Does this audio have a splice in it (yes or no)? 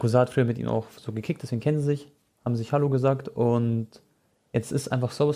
no